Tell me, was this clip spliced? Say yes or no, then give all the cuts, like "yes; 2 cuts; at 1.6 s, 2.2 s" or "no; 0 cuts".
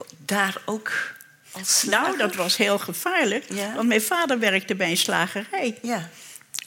no; 0 cuts